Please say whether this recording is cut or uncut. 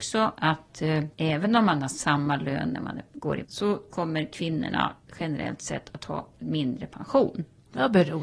cut